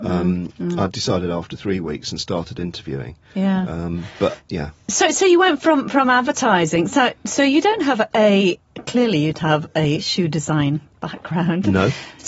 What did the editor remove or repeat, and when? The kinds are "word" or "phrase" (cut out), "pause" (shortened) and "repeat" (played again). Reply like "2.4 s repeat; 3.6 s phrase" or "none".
9.3 s word